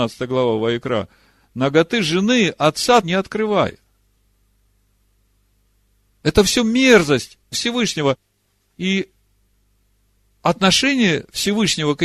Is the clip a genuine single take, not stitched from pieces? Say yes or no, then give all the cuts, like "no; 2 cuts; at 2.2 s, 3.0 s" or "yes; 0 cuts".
no; 2 cuts; at 3.0 s, 7.5 s